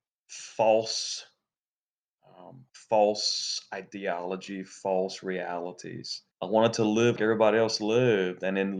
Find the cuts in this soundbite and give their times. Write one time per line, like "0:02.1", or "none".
0:06.3
0:07.2